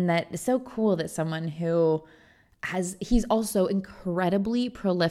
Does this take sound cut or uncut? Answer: uncut